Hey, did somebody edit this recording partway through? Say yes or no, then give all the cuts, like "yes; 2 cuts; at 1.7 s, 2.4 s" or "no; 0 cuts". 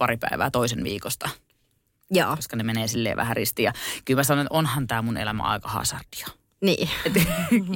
no; 0 cuts